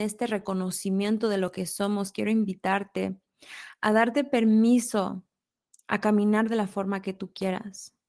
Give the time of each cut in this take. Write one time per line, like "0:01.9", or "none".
none